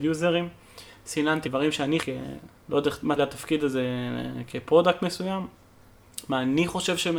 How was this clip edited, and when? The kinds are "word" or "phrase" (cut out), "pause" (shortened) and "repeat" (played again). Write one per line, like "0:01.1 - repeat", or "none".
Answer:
0:01.4 - word
0:02.0 - word
0:02.6 - pause
0:03.2 - word